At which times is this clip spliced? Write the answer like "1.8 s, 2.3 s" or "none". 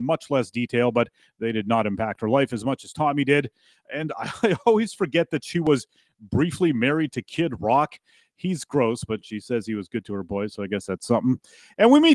none